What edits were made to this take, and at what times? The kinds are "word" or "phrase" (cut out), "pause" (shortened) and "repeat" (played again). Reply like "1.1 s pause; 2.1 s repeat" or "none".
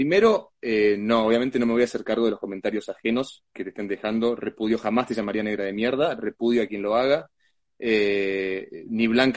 none